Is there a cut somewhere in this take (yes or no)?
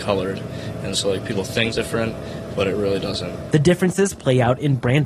yes